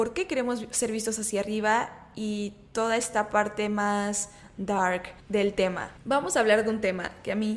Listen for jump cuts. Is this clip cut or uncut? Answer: uncut